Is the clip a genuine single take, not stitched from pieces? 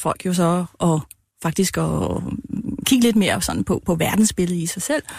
yes; 0 cuts

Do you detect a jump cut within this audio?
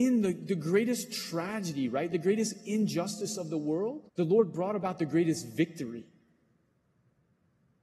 yes; 1 cut; at 4.1 s

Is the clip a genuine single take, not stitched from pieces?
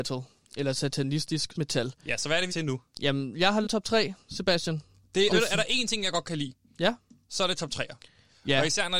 no; 4 cuts; at 1.5 s, 2.5 s, 3.6 s, 5.3 s

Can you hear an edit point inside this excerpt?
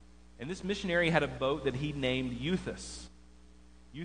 no; 0 cuts

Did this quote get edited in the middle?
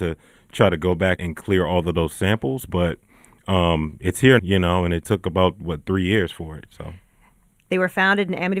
yes; 2 cuts; at 1.2 s, 4.4 s

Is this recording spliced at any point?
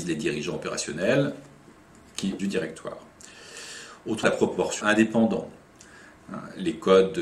yes; 3 cuts; at 2.4 s, 4.2 s, 4.8 s

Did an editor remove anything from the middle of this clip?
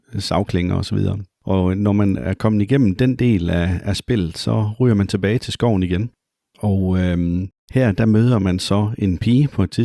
yes; 3 cuts; at 1.3 s, 6.2 s, 7.6 s

